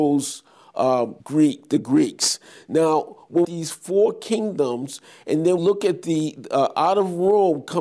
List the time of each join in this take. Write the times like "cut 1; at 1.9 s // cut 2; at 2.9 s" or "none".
cut 1; at 1.2 s // cut 2; at 3.4 s // cut 3; at 5.6 s